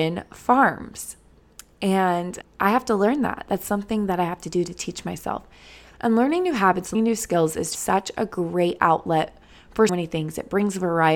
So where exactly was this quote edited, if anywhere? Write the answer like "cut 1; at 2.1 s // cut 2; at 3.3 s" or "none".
cut 1; at 2.4 s // cut 2; at 6.9 s // cut 3; at 7.7 s // cut 4; at 9.9 s